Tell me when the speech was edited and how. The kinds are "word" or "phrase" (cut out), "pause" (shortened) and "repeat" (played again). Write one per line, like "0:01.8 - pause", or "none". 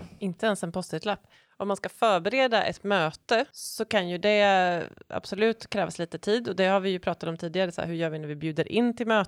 none